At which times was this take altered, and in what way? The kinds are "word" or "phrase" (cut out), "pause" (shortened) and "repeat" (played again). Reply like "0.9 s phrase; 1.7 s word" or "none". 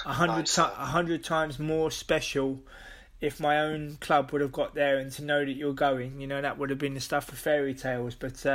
none